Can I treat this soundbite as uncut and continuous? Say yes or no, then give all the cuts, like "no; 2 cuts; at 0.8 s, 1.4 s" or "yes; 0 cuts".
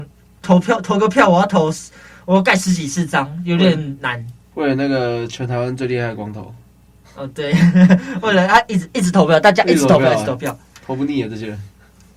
yes; 0 cuts